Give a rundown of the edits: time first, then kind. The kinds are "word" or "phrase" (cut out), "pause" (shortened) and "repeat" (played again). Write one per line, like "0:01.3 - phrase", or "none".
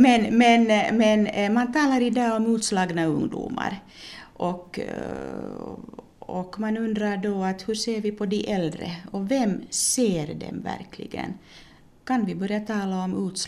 none